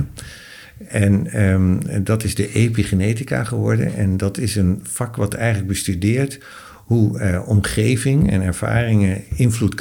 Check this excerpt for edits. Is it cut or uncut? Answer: uncut